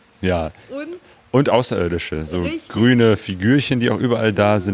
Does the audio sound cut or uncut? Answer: uncut